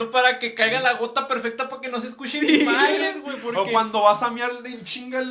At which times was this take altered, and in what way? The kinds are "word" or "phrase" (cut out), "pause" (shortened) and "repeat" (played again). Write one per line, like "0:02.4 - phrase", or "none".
none